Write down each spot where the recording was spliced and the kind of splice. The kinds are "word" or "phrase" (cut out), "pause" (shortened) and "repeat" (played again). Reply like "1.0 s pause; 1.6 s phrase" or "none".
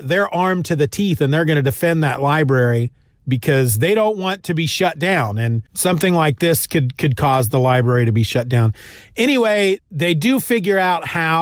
3.1 s pause; 5.7 s pause; 9.8 s word